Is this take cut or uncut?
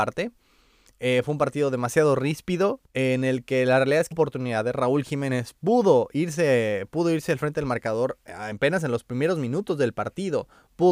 cut